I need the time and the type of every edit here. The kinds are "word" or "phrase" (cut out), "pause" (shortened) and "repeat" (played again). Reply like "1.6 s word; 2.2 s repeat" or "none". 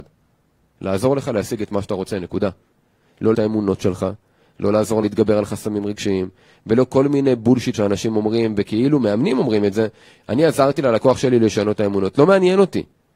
3.3 s word; 5.0 s word; 7.7 s word